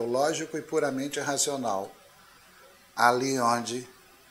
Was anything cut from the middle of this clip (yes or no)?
no